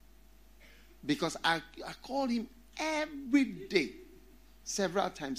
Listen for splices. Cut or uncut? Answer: uncut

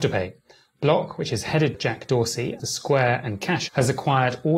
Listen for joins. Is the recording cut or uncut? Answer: cut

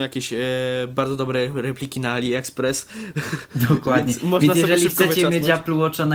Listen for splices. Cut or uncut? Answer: uncut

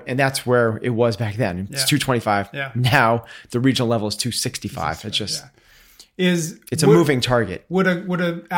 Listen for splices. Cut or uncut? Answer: uncut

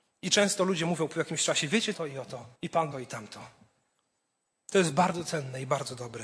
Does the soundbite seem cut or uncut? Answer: cut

